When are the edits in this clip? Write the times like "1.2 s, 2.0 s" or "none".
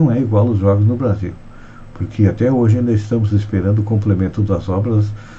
none

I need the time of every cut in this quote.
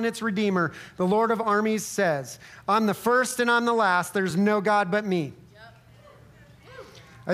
none

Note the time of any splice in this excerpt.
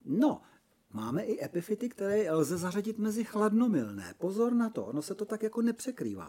none

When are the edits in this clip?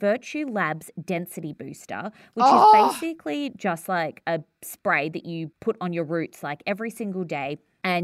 none

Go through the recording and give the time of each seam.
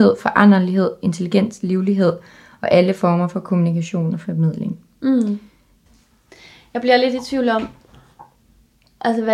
none

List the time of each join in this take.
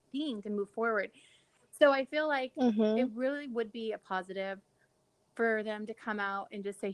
none

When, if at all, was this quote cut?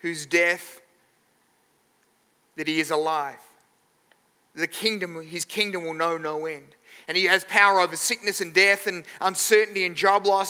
none

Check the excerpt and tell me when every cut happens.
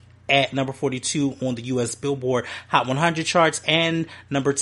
none

